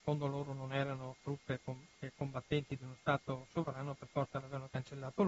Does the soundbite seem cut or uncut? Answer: uncut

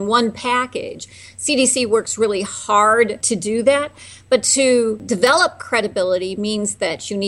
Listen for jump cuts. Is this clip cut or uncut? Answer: uncut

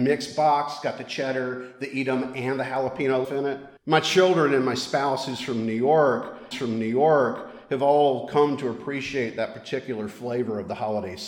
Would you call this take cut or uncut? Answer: cut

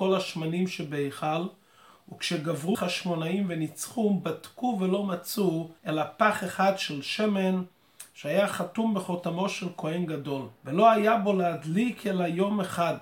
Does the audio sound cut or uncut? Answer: cut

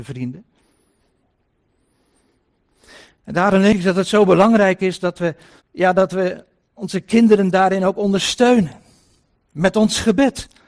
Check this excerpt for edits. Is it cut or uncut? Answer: cut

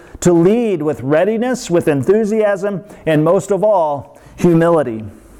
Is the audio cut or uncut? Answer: uncut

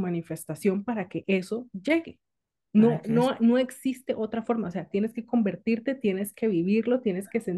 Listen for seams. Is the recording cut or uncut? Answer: uncut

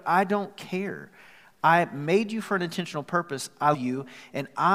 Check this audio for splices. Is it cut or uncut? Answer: cut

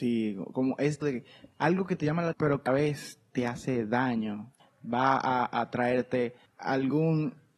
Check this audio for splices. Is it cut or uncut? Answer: cut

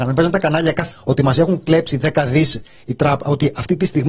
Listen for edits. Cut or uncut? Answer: cut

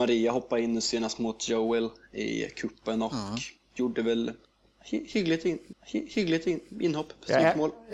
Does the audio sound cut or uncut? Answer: cut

